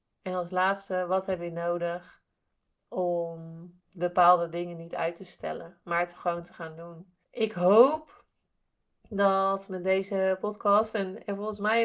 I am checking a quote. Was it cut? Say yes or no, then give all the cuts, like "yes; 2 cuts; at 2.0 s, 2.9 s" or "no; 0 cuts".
yes; 2 cuts; at 3.8 s, 7.2 s